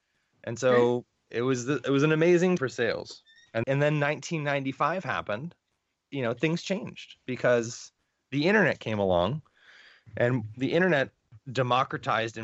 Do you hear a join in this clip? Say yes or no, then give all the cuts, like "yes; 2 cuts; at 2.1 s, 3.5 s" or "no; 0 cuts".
yes; 3 cuts; at 2.6 s, 3.6 s, 5.9 s